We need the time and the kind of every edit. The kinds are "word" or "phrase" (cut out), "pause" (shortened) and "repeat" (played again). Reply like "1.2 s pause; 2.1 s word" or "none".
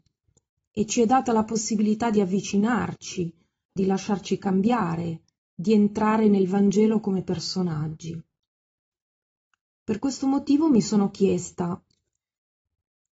3.8 s word